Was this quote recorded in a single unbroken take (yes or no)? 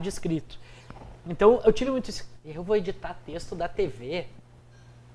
yes